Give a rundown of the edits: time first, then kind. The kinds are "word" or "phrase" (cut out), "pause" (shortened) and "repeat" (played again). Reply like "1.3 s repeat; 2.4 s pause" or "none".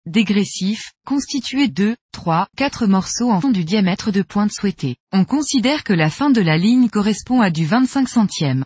1.0 s word; 1.7 s word; 2.5 s word; 3.4 s word; 5.0 s pause